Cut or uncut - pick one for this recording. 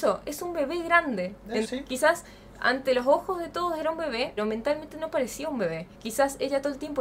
cut